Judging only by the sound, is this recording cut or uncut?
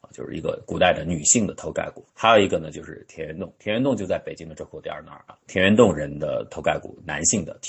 cut